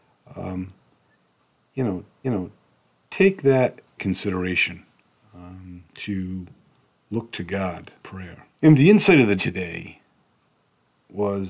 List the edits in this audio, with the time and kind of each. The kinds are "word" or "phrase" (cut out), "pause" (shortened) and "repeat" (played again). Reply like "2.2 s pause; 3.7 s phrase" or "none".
2.2 s repeat; 4.0 s word; 5.9 s pause; 8.0 s phrase; 8.5 s pause; 9.4 s word